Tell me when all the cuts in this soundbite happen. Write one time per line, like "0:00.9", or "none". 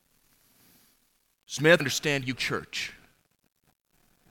0:01.8
0:02.3